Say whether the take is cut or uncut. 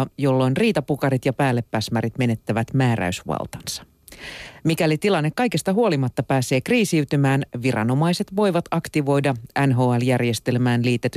uncut